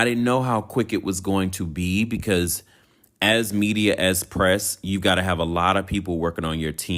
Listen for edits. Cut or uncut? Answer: uncut